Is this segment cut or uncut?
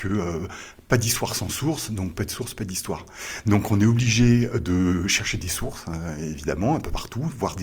uncut